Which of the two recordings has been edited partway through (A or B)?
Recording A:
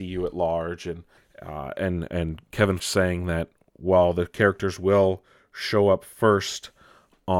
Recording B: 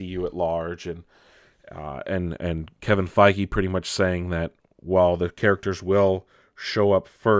A